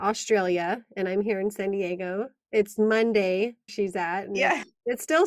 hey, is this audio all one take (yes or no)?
no